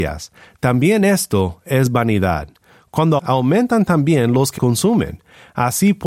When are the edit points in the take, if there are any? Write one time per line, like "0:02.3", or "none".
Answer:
0:03.2
0:04.6

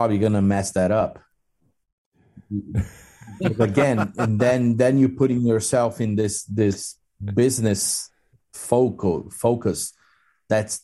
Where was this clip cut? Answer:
none

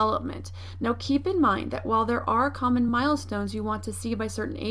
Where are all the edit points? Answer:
none

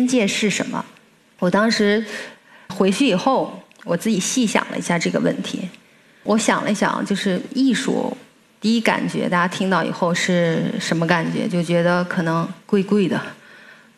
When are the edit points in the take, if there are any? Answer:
0:02.7

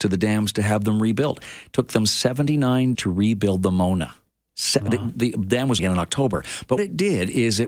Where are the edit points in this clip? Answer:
0:02.9
0:05.8
0:06.8

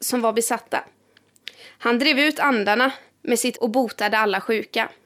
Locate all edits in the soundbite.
0:03.5

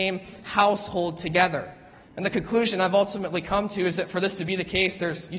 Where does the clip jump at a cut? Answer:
0:02.0

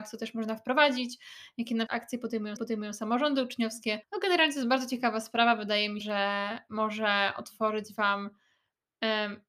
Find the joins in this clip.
0:01.9
0:02.6
0:04.0
0:06.0

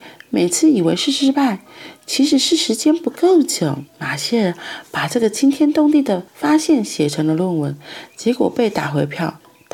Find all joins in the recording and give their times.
0:03.9
0:06.3

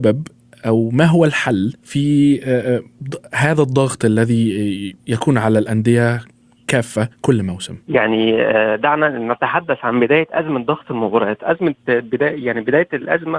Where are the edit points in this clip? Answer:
0:01.8
0:05.0
0:07.1
0:07.8

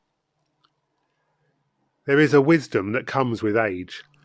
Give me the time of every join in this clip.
none

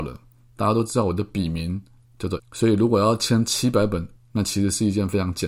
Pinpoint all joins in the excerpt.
0:02.4
0:04.2

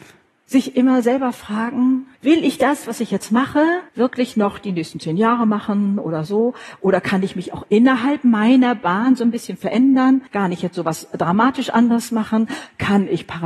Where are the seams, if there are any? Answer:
0:02.1
0:03.9
0:10.3

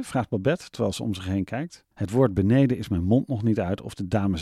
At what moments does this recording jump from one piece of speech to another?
0:01.9

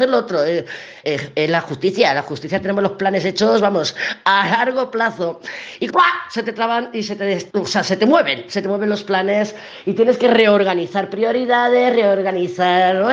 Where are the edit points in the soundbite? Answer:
0:01.0
0:05.9
0:07.5

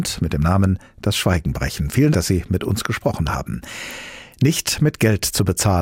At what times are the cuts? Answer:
0:02.1

